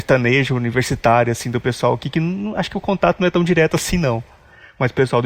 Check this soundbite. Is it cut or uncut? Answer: uncut